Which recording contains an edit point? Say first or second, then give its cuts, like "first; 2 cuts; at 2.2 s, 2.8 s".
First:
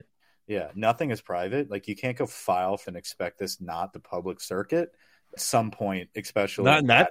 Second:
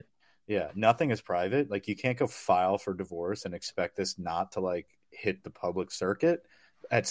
first; 3 cuts; at 2.9 s, 3.9 s, 5.4 s